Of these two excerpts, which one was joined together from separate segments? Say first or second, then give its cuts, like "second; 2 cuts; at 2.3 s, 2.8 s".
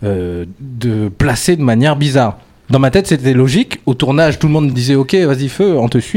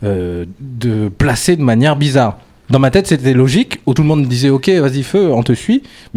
second; 1 cut; at 4.0 s